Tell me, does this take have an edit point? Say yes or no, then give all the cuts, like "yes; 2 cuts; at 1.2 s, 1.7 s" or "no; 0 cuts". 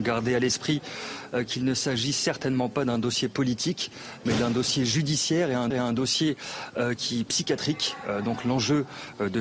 yes; 1 cut; at 5.7 s